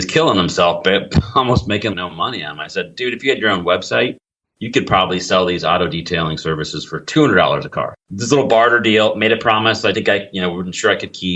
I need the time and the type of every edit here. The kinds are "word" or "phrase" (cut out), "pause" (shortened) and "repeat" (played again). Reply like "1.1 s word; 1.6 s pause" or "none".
1.9 s word; 8.1 s word; 9.9 s word